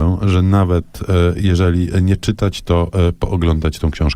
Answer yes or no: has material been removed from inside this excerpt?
no